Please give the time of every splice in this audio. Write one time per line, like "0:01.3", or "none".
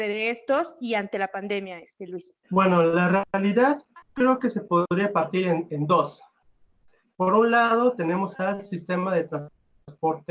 0:02.4